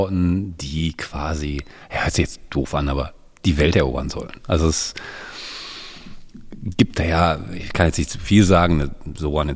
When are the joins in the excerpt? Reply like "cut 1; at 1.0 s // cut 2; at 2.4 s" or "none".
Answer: none